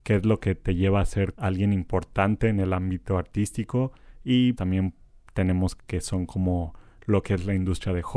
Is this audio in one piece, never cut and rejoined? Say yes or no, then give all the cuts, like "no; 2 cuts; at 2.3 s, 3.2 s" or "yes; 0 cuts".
no; 3 cuts; at 1.3 s, 4.5 s, 5.8 s